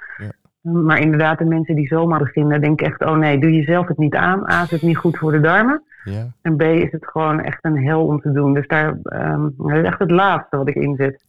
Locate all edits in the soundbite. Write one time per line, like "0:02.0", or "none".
0:02.2